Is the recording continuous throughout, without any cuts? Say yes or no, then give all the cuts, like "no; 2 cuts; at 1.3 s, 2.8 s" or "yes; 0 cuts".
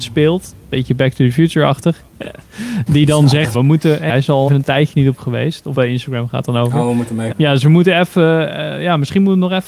no; 7 cuts; at 2.9 s, 3.5 s, 4.1 s, 4.5 s, 5.2 s, 5.7 s, 7.3 s